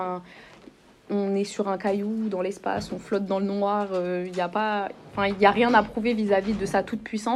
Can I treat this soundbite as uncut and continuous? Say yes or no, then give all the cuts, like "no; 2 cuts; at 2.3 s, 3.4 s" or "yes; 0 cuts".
yes; 0 cuts